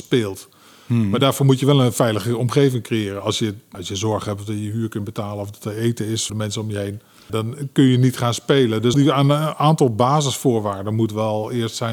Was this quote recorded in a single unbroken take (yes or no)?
no